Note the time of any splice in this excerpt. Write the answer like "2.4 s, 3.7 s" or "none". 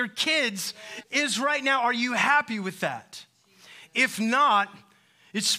1.0 s